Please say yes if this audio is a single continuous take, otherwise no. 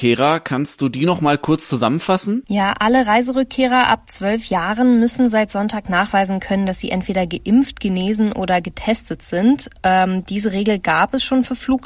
yes